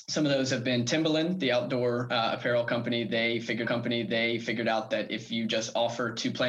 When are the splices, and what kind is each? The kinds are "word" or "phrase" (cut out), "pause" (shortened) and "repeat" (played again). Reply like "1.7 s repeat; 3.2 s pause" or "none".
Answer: 3.6 s repeat